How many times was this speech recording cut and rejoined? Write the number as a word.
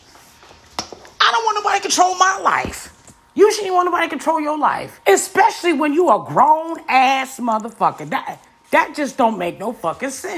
two